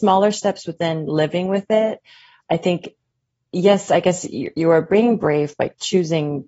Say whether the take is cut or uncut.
uncut